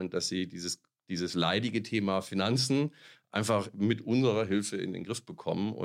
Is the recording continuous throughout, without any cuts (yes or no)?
yes